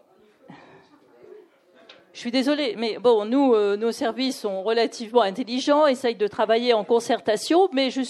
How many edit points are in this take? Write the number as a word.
zero